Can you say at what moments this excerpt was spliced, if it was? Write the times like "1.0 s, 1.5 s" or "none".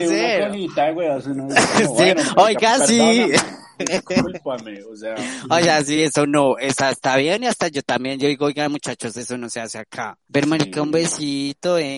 none